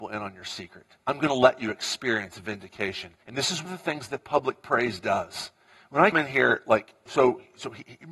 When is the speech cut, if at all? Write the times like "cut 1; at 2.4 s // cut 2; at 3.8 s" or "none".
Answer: cut 1; at 1.0 s // cut 2; at 3.2 s // cut 3; at 3.7 s // cut 4; at 5.7 s // cut 5; at 6.1 s // cut 6; at 7.1 s